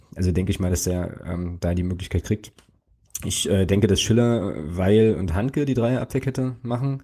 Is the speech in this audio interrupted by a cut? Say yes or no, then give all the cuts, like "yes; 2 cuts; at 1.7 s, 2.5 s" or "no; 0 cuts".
no; 0 cuts